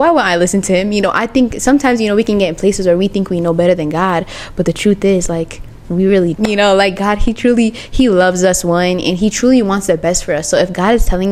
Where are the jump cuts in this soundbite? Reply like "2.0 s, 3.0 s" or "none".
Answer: 6.3 s